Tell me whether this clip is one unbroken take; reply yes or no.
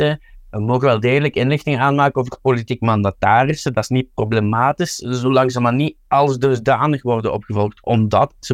yes